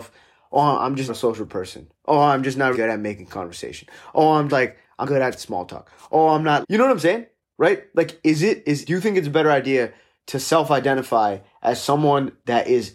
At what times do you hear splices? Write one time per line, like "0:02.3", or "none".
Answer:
0:01.1
0:02.7
0:04.5
0:05.0
0:06.6
0:08.9